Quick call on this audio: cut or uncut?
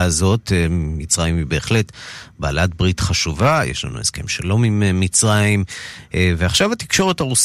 uncut